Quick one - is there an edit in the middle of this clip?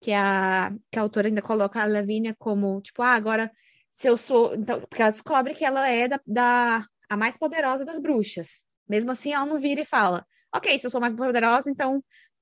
no; 0 cuts

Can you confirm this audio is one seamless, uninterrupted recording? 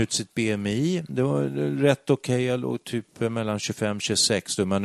yes; 0 cuts

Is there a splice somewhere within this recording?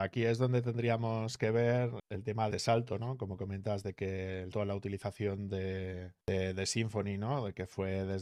yes; 4 cuts; at 2.0 s, 2.5 s, 4.5 s, 6.2 s

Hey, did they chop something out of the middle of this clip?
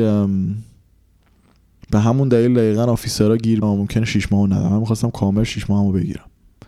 yes; 1 cut; at 3.6 s

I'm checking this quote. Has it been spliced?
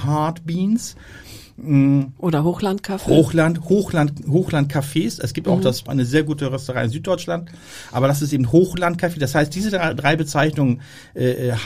yes; 1 cut; at 5.9 s

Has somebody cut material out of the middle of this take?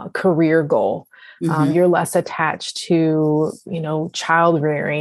no; 0 cuts

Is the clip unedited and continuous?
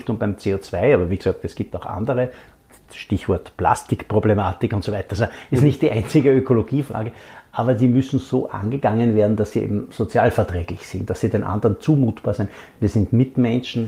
yes; 0 cuts

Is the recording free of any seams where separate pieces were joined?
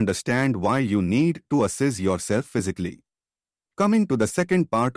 yes; 0 cuts

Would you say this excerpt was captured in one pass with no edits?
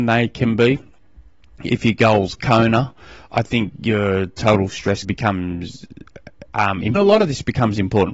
no; 2 cuts; at 5.0 s, 7.0 s

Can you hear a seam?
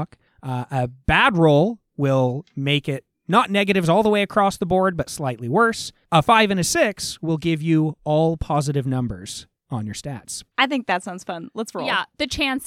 yes; 1 cut; at 10.5 s

